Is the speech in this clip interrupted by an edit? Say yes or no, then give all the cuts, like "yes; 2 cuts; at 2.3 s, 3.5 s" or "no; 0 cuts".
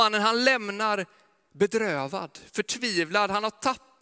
no; 0 cuts